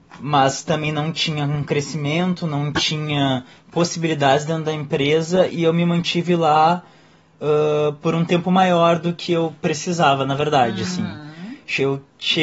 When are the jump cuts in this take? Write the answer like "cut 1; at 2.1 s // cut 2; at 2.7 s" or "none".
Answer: none

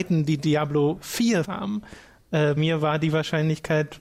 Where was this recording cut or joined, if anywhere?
cut 1; at 1.4 s // cut 2; at 2.6 s

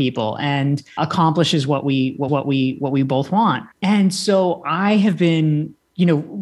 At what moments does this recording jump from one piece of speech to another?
cut 1; at 1.0 s // cut 2; at 2.3 s // cut 3; at 3.7 s

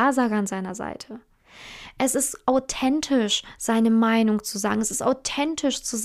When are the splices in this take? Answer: none

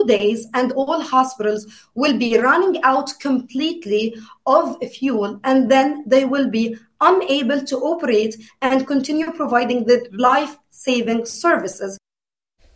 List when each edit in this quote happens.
none

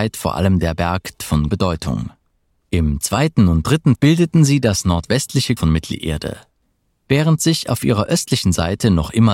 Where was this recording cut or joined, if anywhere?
cut 1; at 1.2 s // cut 2; at 1.5 s // cut 3; at 3.9 s // cut 4; at 5.6 s

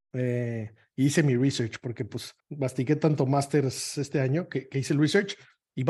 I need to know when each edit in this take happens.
cut 1; at 2.4 s

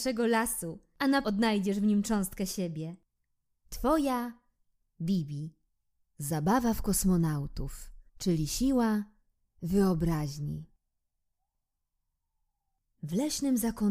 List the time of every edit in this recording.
cut 1; at 1.2 s // cut 2; at 5.7 s // cut 3; at 8.1 s

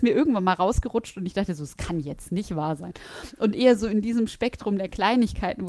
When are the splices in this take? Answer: none

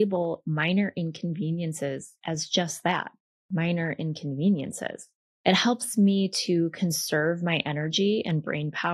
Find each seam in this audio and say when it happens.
cut 1; at 5.2 s

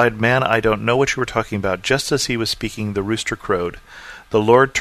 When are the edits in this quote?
none

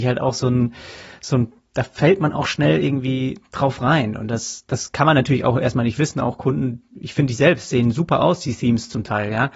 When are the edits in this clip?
cut 1; at 6.9 s

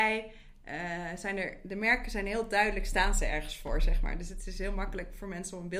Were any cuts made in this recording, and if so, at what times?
none

